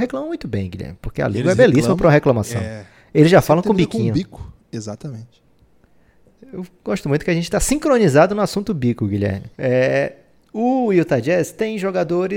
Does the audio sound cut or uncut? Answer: cut